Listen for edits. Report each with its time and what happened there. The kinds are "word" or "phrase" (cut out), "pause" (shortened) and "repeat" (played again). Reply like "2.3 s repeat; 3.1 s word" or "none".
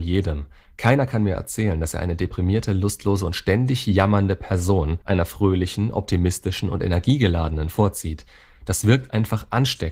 5.0 s pause